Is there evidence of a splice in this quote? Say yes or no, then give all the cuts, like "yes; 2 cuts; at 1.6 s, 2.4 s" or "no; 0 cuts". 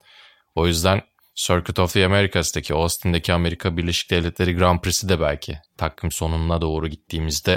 no; 0 cuts